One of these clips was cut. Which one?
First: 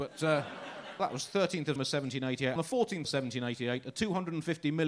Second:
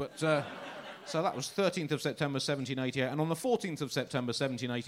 first; 4 cuts; at 1.0 s, 1.8 s, 2.6 s, 3.0 s

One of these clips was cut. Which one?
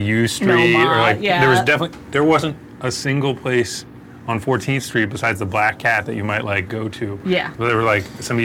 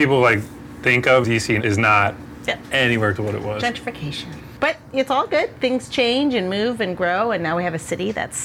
second; 3 cuts; at 1.2 s, 1.6 s, 3.1 s

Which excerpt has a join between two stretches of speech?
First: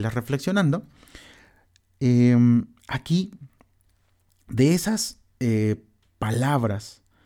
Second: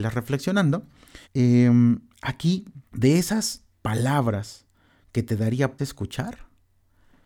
second; 4 cuts; at 1.2 s, 2.9 s, 3.7 s, 5.8 s

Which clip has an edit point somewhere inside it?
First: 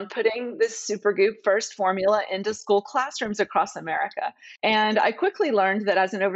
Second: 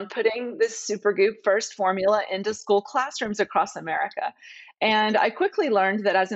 first; 1 cut; at 4.6 s

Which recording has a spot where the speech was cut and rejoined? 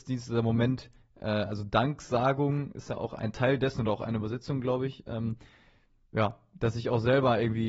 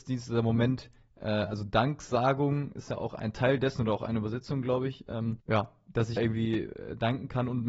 second; 2 cuts; at 5.4 s, 6.2 s

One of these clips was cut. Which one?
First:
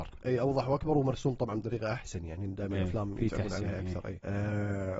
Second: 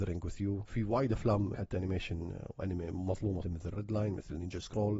second; 2 cuts; at 1.5 s, 3.4 s

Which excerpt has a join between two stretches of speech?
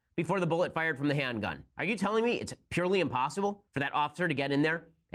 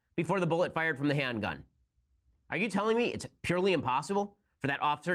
first; 2 cuts; at 1.7 s, 3.7 s

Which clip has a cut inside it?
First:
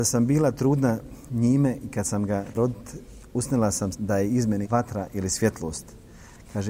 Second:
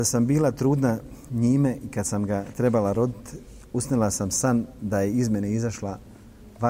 first; 3 cuts; at 2.5 s, 3.9 s, 4.6 s

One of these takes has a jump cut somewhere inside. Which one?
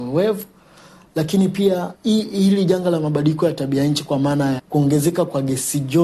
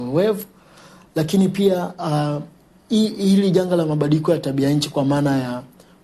first; 2 cuts; at 1.9 s, 4.6 s

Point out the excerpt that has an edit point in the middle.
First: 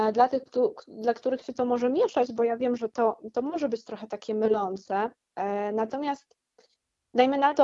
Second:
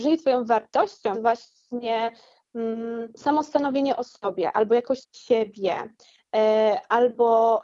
second; 3 cuts; at 1.1 s, 3.1 s, 5.0 s

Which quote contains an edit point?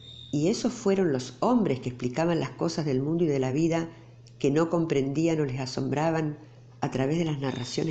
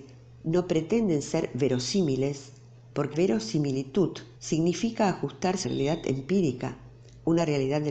second; 3 cuts; at 3.1 s, 4.4 s, 5.6 s

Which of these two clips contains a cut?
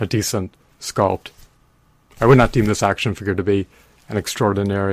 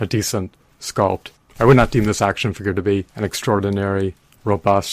second; 2 cuts; at 1.4 s, 3.1 s

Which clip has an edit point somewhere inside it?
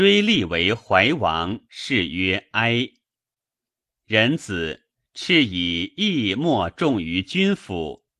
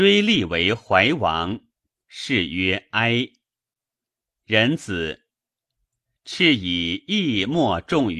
first; 2 cuts; at 1.6 s, 5.0 s

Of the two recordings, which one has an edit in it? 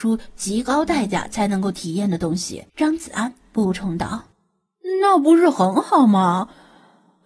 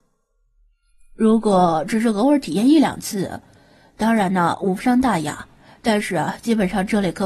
first; 2 cuts; at 2.7 s, 4.3 s

